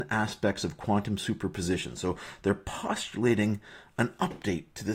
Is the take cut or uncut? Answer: uncut